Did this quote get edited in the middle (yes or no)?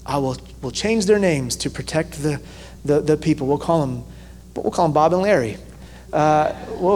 no